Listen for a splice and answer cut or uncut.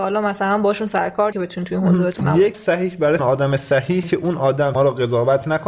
cut